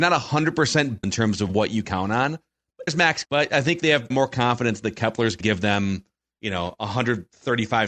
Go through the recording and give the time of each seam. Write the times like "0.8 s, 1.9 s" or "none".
1.0 s, 1.8 s, 2.9 s, 3.2 s, 4.1 s, 5.4 s